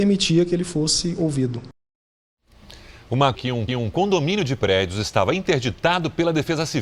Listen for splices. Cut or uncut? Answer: cut